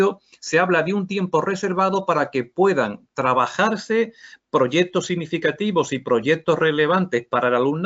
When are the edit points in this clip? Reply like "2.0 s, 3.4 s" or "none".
none